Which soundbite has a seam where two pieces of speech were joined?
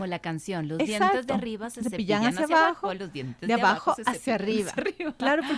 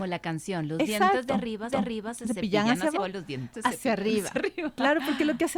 second; 3 cuts; at 1.7 s, 3.0 s, 3.5 s

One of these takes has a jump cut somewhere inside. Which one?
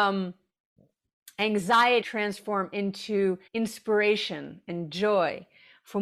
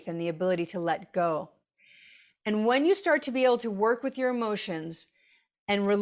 first; 2 cuts; at 2.0 s, 3.5 s

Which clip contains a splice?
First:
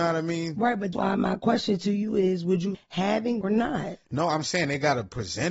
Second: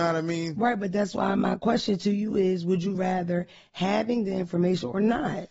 first; 3 cuts; at 0.9 s, 2.7 s, 3.4 s

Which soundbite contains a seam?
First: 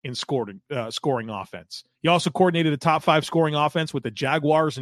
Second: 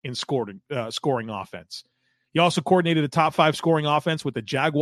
first; 1 cut; at 1.9 s

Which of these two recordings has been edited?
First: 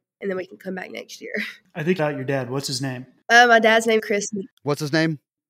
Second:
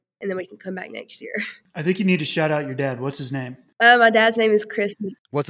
first; 2 cuts; at 2.0 s, 4.0 s

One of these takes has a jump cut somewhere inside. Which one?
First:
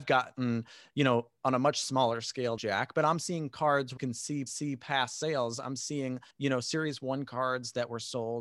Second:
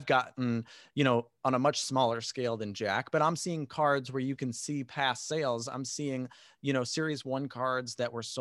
first; 4 cuts; at 2.6 s, 4.0 s, 4.5 s, 6.3 s

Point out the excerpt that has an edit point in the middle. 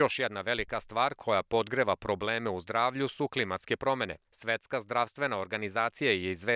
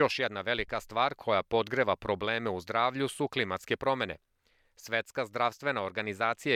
first; 1 cut; at 4.3 s

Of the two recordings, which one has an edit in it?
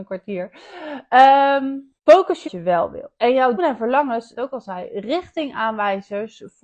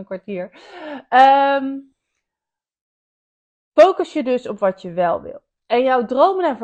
first; 5 cuts; at 2.0 s, 2.4 s, 3.2 s, 3.6 s, 4.3 s

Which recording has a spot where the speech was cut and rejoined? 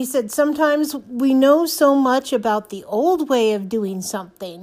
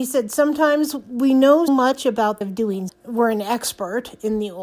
second; 3 cuts; at 1.7 s, 2.4 s, 2.9 s

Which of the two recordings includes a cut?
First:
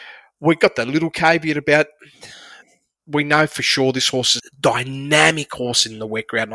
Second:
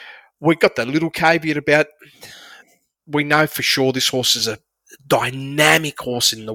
first; 1 cut; at 4.4 s

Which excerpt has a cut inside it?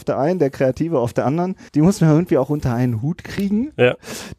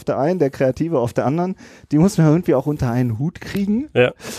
first; 1 cut; at 1.7 s

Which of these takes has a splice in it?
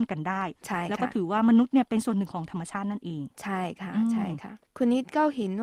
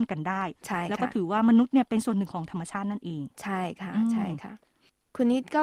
first; 1 cut; at 4.7 s

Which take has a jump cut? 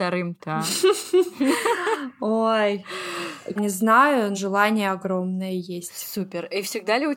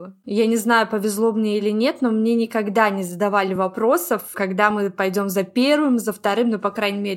first; 2 cuts; at 3.6 s, 4.3 s

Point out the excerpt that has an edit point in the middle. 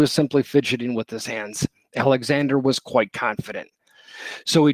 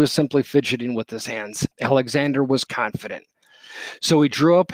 second; 2 cuts; at 1.7 s, 2.7 s

